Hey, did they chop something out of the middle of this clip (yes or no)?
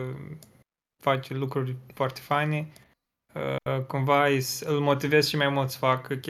no